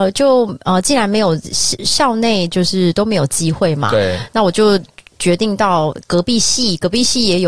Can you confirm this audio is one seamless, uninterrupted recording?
yes; 0 cuts

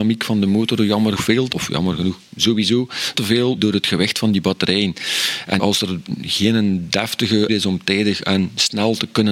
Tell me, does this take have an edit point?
yes; 6 cuts; at 1.2 s, 1.5 s, 3.1 s, 3.6 s, 5.6 s, 7.5 s

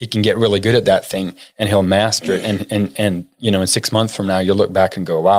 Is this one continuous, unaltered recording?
yes; 0 cuts

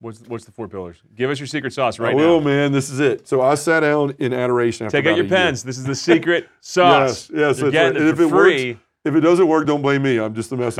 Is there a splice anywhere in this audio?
no; 0 cuts

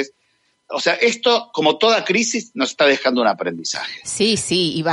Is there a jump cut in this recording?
no; 0 cuts

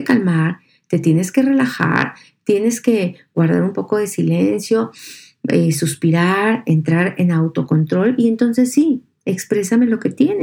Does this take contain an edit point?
no; 0 cuts

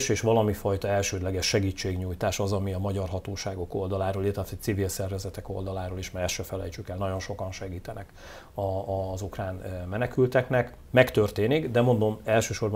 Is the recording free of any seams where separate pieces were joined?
yes; 0 cuts

